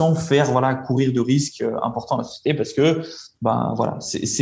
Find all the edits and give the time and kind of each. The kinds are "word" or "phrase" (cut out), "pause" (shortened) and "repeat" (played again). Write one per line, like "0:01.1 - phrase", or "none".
none

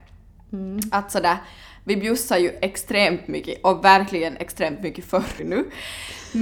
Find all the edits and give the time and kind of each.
0:05.4 - word

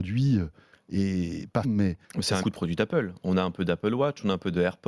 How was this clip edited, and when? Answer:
0:01.6 - word
0:02.0 - pause
0:02.4 - phrase

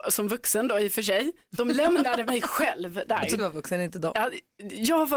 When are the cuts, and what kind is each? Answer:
0:03.4 - word

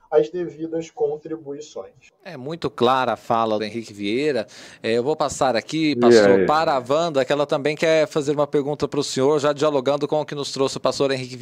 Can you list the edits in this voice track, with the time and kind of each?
0:02.2 - pause
0:03.6 - phrase

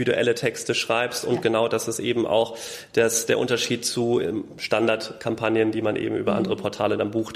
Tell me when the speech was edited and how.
none

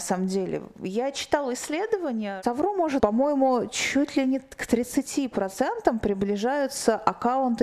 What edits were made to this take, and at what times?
0:03.0 - word

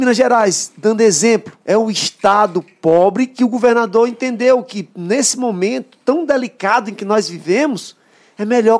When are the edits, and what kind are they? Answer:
0:01.6 - pause

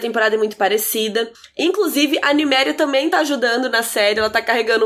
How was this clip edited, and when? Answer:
none

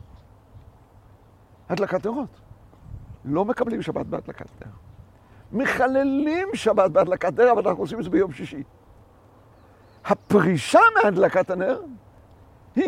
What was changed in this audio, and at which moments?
none

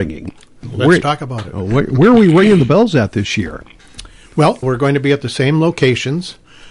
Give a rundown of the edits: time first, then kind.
0:04.6 - word

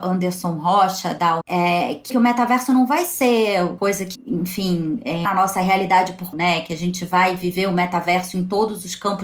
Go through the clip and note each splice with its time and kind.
0:01.4 - word
0:02.1 - phrase
0:03.8 - word
0:04.1 - word
0:05.2 - word
0:06.3 - word

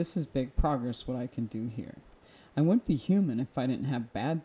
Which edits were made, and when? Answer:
none

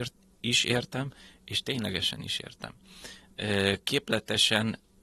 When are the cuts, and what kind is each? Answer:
none

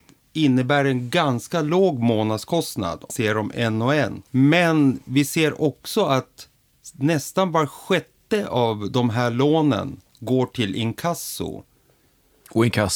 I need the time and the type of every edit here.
0:03.1 - word
0:04.3 - pause
0:10.1 - pause

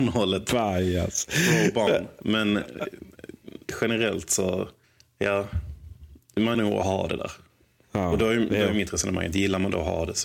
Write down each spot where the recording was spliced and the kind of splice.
0:04.8 - pause
0:06.5 - word

